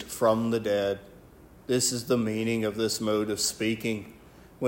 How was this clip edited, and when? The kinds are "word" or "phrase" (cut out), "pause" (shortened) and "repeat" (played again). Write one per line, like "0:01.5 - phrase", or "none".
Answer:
none